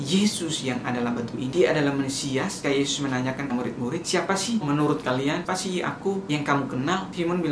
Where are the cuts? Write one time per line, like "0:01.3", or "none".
0:01.3
0:02.6
0:03.5
0:04.6
0:05.5